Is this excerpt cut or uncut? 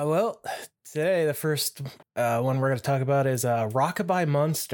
cut